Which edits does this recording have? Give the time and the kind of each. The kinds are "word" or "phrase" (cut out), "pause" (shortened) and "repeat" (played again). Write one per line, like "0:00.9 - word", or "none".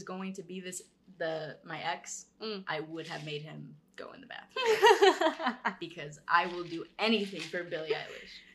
none